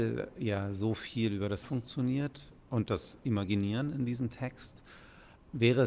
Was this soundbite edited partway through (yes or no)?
yes